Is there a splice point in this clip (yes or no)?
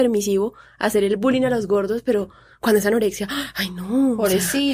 no